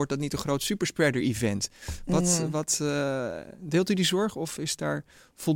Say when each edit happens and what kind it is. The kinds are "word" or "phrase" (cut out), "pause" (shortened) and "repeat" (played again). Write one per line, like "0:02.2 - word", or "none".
none